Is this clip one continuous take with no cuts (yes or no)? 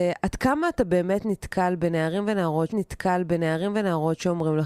no